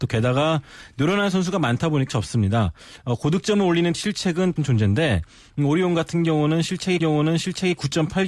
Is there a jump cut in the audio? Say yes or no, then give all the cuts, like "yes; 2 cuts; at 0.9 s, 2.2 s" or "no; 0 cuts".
yes; 4 cuts; at 2.1 s, 3.9 s, 4.6 s, 7.0 s